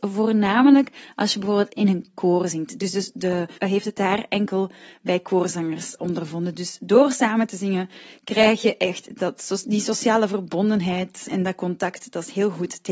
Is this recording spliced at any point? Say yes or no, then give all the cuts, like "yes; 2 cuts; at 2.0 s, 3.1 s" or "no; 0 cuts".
yes; 3 cuts; at 3.6 s, 6.0 s, 11.3 s